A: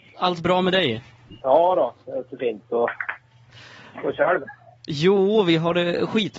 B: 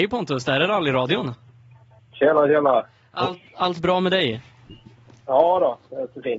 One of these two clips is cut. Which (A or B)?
A